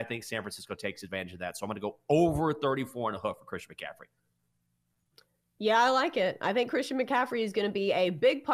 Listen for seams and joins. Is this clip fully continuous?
yes; 0 cuts

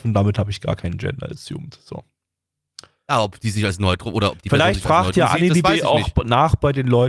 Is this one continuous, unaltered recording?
yes; 0 cuts

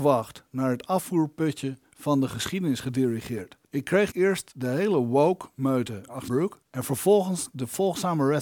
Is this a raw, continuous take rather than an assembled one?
no; 4 cuts; at 3.6 s, 4.1 s, 6.3 s, 6.6 s

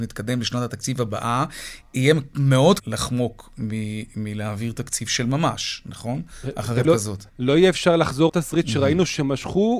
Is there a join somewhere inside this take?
yes; 4 cuts; at 2.8 s, 6.8 s, 7.3 s, 8.3 s

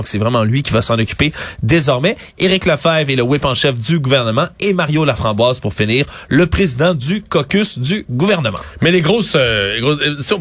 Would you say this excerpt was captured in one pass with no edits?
yes; 0 cuts

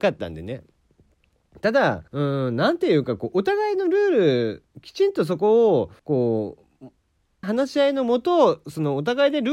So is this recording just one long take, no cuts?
no; 4 cuts; at 2.1 s, 4.7 s, 6.0 s, 7.4 s

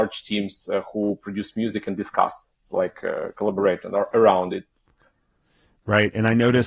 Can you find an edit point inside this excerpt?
no; 0 cuts

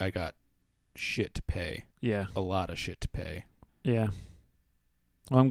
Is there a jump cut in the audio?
yes; 2 cuts; at 1.9 s, 3.7 s

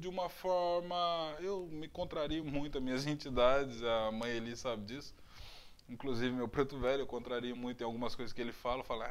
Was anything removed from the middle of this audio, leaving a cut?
no; 0 cuts

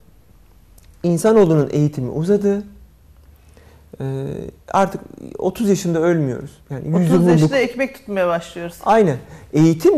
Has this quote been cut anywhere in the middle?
yes; 2 cuts; at 4.6 s, 6.6 s

